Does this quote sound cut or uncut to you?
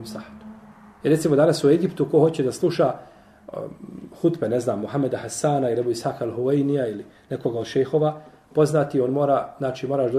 uncut